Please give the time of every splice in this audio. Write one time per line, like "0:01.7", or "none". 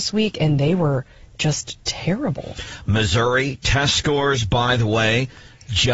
none